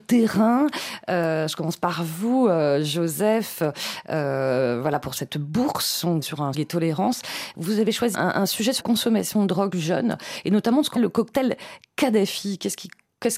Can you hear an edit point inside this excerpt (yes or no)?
yes